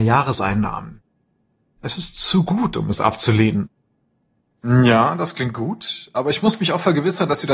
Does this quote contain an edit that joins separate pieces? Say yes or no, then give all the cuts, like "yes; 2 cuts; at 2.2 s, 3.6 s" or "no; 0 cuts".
no; 0 cuts